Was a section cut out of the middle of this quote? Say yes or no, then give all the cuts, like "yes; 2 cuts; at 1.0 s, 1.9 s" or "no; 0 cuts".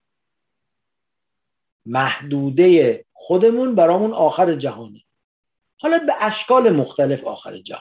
no; 0 cuts